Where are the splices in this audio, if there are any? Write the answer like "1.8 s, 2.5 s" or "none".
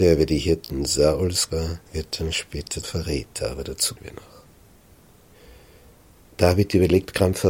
1.5 s, 1.9 s, 2.8 s, 4.0 s